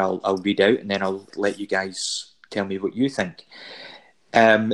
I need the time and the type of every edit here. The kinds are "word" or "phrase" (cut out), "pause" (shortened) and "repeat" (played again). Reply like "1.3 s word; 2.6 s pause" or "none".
1.3 s word

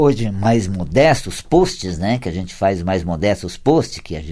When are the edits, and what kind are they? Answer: none

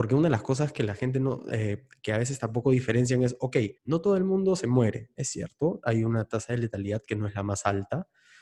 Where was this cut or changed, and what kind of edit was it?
3.8 s pause

